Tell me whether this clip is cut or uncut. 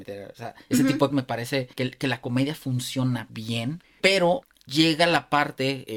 cut